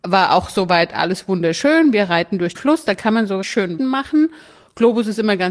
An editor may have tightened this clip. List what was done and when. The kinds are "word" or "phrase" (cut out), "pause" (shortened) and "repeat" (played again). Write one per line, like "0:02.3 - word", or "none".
0:02.5 - word
0:03.4 - word
0:03.8 - word